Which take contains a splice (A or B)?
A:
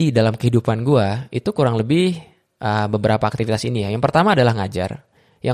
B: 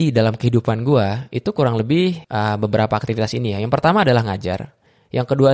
B